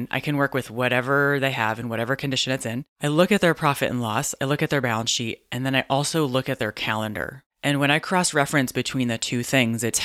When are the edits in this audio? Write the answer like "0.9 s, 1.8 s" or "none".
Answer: none